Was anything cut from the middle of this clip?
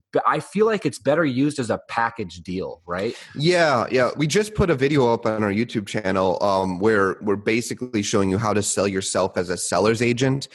no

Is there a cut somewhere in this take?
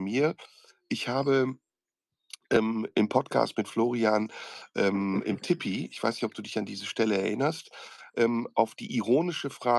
no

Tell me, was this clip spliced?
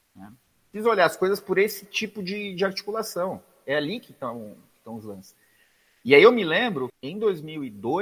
yes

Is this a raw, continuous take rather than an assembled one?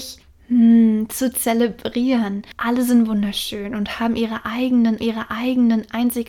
no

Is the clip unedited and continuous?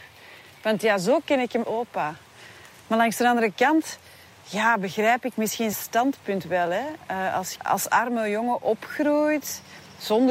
no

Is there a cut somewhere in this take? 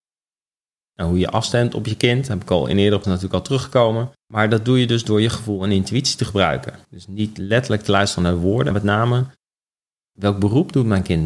yes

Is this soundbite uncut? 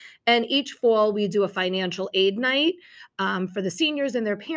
yes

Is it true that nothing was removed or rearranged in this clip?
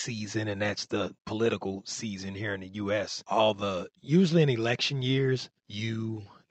no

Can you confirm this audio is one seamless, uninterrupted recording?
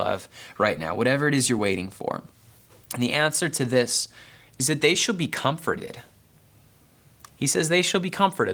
yes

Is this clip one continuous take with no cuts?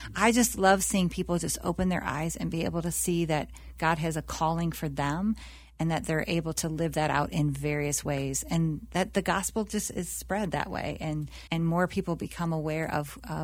no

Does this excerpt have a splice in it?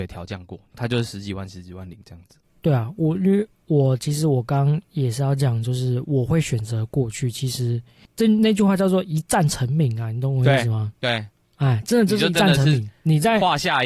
yes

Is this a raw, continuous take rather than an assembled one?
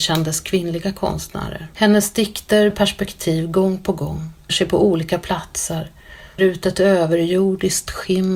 no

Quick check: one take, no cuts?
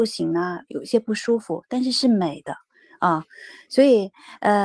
yes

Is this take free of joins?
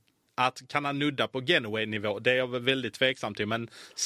yes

